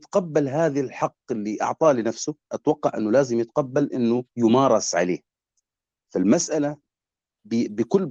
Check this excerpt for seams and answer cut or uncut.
cut